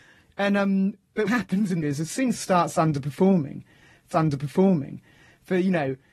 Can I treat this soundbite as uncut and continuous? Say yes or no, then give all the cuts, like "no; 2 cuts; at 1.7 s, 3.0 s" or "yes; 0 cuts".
no; 4 cuts; at 1.3 s, 1.8 s, 2.4 s, 4.1 s